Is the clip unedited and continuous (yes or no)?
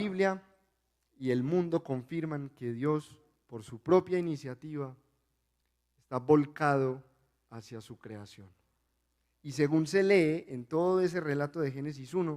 yes